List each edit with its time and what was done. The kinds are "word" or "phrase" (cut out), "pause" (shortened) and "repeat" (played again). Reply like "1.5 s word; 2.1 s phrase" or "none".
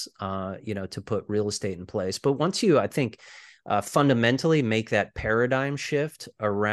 none